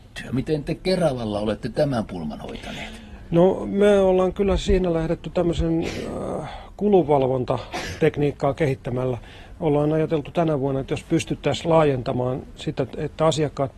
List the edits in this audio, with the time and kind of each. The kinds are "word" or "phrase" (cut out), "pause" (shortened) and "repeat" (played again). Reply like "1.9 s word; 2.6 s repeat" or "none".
none